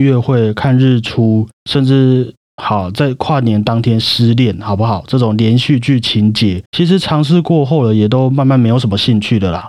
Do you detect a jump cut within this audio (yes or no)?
yes